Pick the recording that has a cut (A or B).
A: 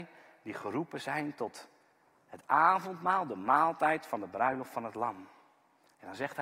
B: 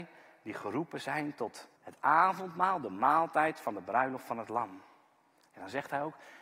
B